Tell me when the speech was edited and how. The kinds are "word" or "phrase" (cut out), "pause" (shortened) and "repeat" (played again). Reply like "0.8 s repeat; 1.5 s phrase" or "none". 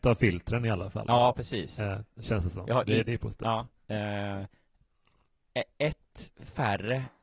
3.8 s pause

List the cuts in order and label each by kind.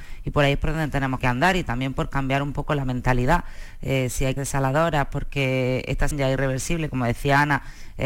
1.2 s word; 4.4 s word; 6.1 s word

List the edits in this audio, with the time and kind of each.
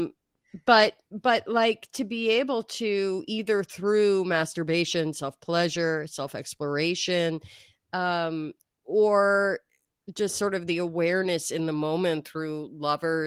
none

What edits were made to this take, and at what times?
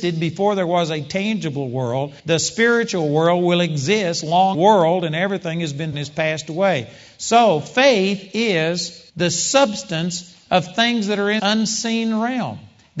2.2 s pause; 4.5 s phrase; 5.9 s word; 9.1 s pause; 11.4 s word

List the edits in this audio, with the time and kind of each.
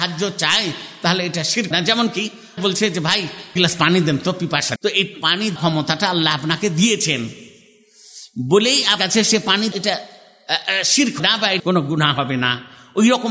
1.7 s word; 2.6 s word; 3.6 s word; 4.8 s word; 5.6 s word; 9.0 s word; 9.7 s word; 11.2 s word; 11.6 s word

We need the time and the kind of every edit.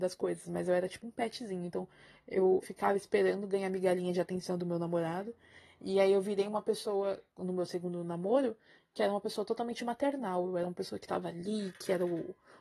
2.6 s word; 7.3 s pause

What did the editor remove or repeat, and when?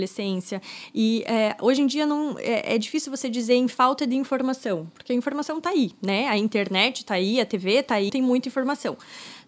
8.1 s word

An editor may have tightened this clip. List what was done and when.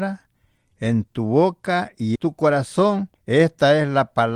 2.2 s word; 3.2 s pause

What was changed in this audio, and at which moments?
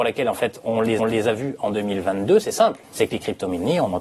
1.0 s repeat; 2.8 s pause

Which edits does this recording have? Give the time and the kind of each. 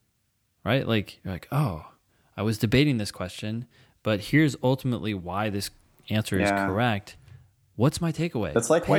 none

